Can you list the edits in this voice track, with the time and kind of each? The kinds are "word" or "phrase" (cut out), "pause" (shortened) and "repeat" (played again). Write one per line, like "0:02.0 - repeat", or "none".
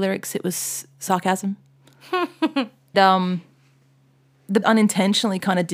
0:02.9 - word
0:04.6 - word